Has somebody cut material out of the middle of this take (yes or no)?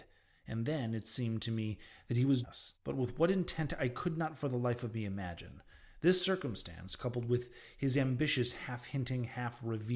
yes